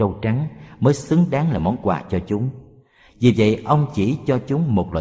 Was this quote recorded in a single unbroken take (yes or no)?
yes